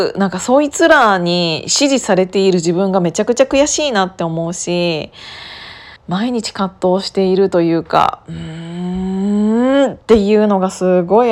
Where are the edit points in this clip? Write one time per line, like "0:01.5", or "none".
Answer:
0:06.0